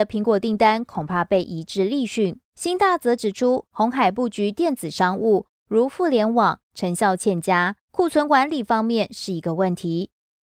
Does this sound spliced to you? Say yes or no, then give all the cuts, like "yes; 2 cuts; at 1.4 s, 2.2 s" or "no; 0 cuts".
yes; 2 cuts; at 2.4 s, 7.8 s